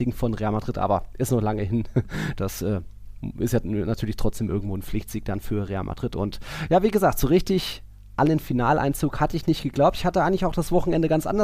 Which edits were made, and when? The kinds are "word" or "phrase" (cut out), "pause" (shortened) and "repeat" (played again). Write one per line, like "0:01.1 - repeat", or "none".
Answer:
none